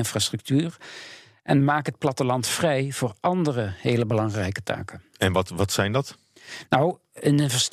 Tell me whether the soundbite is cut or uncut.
uncut